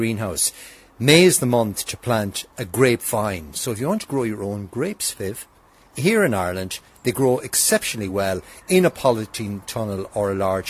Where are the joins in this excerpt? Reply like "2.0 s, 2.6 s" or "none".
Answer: none